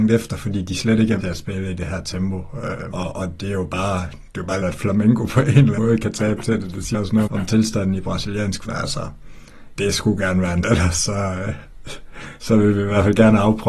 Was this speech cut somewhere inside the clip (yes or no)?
yes